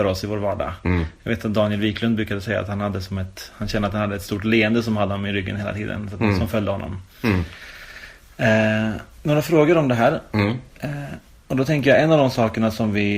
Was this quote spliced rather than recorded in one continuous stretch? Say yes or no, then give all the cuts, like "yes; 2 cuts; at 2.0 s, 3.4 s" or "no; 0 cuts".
no; 0 cuts